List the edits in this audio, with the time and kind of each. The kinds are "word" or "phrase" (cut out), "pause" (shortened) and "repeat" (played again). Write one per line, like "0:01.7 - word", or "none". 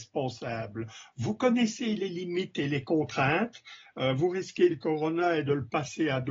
0:04.7 - word